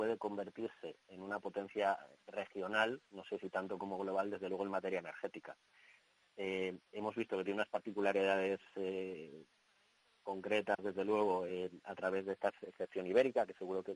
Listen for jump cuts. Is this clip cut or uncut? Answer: uncut